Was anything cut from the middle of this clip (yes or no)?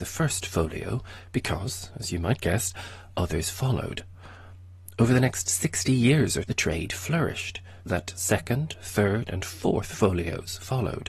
yes